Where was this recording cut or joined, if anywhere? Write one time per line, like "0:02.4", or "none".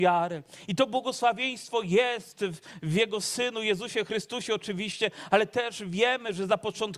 none